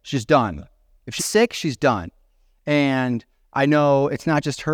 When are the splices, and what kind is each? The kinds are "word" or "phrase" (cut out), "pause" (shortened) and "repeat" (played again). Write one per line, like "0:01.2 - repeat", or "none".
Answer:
0:01.2 - word
0:03.3 - pause